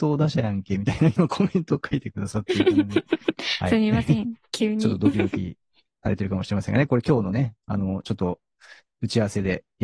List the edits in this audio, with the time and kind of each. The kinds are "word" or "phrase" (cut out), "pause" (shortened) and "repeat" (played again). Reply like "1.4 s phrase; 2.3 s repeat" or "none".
none